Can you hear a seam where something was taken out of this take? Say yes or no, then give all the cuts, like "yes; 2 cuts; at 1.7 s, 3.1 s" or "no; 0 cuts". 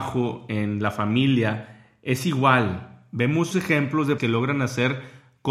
yes; 2 cuts; at 3.5 s, 4.2 s